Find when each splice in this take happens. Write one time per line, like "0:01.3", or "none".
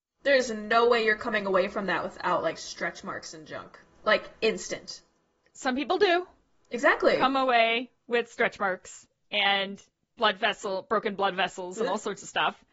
none